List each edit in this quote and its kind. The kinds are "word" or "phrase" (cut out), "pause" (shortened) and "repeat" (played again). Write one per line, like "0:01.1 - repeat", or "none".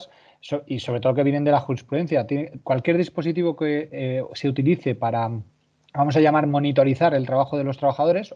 none